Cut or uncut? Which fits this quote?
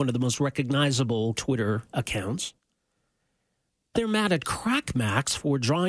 cut